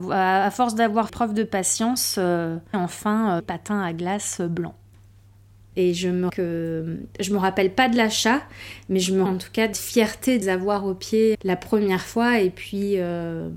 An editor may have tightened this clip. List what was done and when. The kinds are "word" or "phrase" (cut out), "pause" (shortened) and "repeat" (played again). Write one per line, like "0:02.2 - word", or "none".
0:01.1 - word
0:02.7 - word
0:03.4 - word
0:06.3 - word
0:09.3 - word
0:09.7 - word
0:10.4 - word
0:11.3 - word